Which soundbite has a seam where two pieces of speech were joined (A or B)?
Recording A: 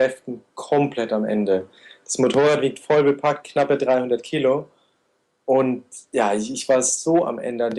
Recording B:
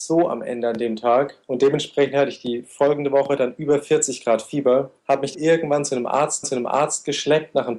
B